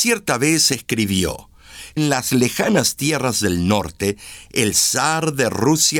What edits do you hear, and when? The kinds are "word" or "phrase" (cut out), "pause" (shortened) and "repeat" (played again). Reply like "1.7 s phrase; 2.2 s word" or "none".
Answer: 2.0 s word